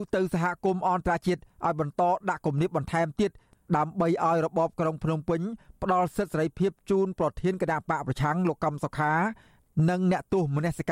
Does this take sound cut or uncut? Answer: uncut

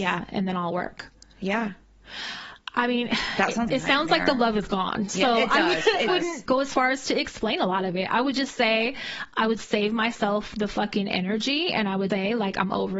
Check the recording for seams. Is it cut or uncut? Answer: cut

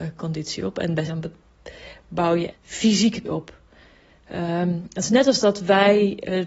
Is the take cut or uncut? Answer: cut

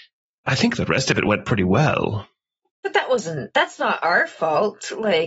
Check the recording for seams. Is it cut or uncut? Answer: uncut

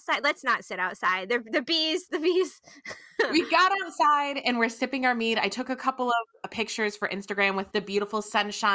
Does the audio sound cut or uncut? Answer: cut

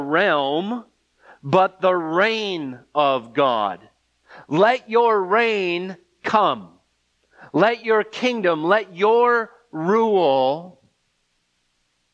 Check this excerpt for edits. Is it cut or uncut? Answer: uncut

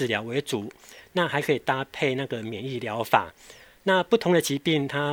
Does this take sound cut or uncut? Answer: uncut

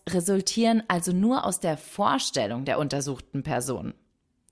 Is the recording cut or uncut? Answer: uncut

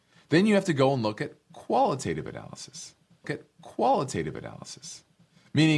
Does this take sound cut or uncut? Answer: cut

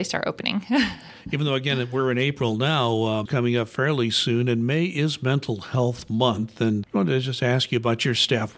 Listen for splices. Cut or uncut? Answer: cut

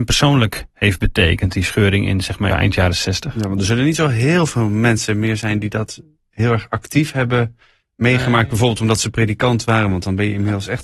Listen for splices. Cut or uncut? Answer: cut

